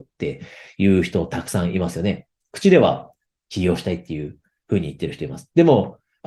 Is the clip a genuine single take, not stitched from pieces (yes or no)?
yes